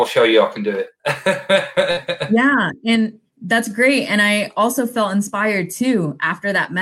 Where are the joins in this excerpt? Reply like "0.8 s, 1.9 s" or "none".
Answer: none